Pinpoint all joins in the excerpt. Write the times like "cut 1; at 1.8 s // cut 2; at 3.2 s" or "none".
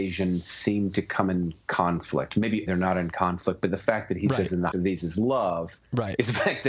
cut 1; at 1.6 s // cut 2; at 2.7 s // cut 3; at 4.7 s